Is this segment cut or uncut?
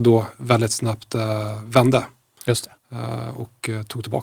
uncut